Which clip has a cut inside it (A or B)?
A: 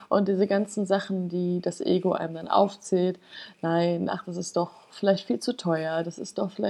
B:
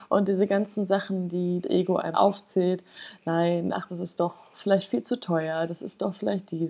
B